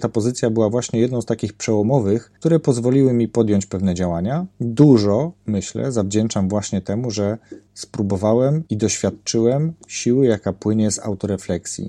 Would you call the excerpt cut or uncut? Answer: cut